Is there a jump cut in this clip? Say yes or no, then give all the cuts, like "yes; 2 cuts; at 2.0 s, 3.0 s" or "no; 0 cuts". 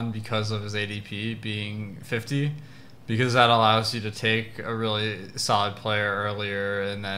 no; 0 cuts